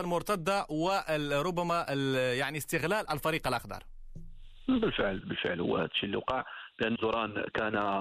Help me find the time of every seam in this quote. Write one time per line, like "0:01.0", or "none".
0:03.1
0:05.2
0:07.0